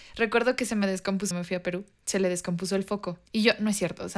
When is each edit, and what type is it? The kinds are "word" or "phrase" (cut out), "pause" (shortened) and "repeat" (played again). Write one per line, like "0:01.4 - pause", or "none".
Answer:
0:01.3 - phrase
0:03.3 - pause

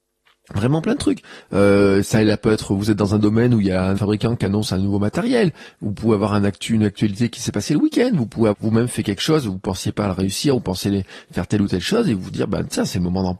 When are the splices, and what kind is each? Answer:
0:03.9 - word
0:08.5 - word

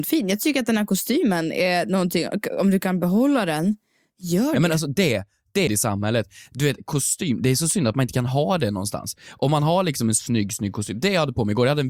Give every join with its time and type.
0:05.7 - phrase

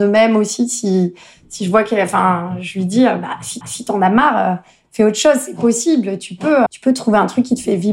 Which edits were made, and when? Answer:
0:03.6 - repeat
0:06.7 - word

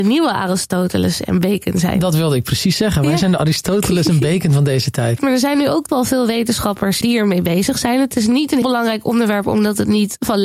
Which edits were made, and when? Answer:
0:05.9 - word
0:07.0 - word
0:08.6 - word

